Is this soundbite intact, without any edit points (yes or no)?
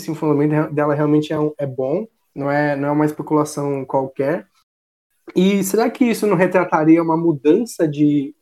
yes